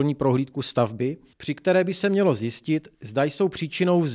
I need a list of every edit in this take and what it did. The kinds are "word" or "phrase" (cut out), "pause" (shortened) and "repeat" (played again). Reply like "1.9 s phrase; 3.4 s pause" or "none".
1.3 s pause; 2.9 s pause